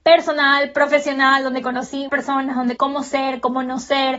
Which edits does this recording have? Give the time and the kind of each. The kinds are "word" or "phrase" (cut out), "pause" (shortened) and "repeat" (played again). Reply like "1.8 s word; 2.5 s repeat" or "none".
2.1 s word; 2.8 s word